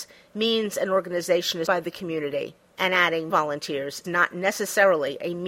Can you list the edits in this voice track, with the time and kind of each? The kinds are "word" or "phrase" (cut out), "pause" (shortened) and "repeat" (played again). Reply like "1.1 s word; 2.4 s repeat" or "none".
1.7 s word; 2.6 s pause; 3.3 s word; 4.0 s word